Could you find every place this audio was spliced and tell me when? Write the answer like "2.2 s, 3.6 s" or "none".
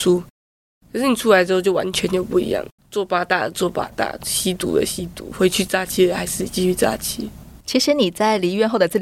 2.8 s, 7.6 s